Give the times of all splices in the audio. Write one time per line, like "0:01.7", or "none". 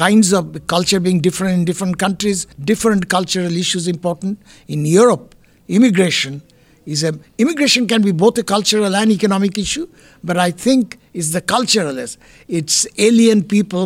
0:02.5
0:07.3